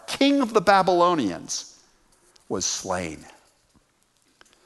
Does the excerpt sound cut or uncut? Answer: uncut